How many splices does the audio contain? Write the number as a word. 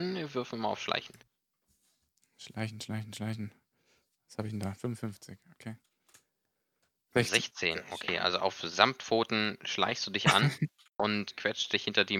one